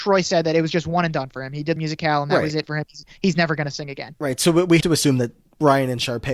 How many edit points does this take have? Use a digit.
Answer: 2